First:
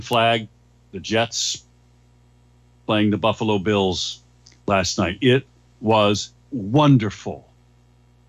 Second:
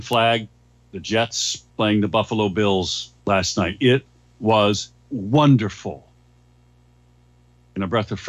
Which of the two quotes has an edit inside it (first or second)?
second